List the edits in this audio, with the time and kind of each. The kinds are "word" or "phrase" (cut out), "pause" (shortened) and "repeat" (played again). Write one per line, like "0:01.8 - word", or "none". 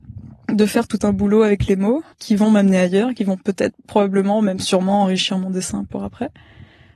0:02.1 - pause